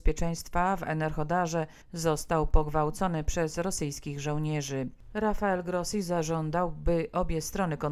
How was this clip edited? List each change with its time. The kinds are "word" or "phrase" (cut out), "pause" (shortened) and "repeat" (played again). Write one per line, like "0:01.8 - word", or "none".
0:01.8 - pause